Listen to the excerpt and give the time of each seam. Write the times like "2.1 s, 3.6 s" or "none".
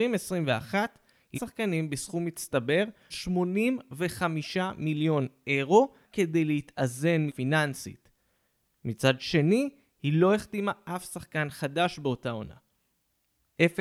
1.3 s, 3.1 s, 6.0 s, 7.3 s